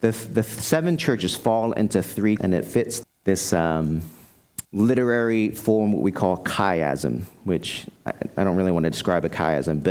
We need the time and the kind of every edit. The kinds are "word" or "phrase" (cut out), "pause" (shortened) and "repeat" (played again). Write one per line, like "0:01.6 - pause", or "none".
0:02.4 - word
0:03.0 - word
0:04.6 - pause